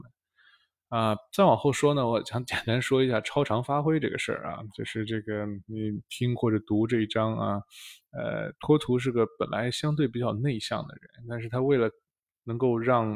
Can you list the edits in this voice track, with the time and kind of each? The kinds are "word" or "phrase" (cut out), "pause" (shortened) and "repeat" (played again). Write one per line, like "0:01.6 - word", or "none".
none